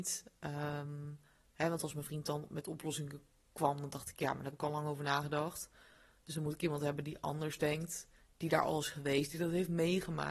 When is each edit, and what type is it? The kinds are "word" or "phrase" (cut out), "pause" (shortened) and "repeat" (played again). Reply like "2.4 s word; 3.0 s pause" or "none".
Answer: none